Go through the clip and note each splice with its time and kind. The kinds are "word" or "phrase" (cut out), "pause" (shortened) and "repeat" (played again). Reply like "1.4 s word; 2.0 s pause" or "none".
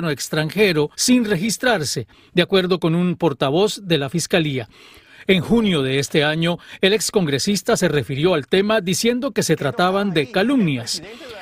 0.9 s pause